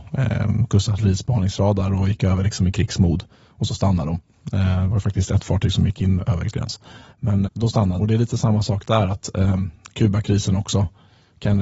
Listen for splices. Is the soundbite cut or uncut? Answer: cut